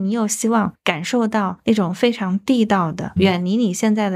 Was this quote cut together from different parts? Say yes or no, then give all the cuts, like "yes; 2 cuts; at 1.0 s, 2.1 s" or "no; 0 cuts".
yes; 1 cut; at 3.2 s